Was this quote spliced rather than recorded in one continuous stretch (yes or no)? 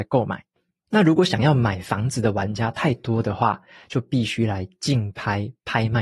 no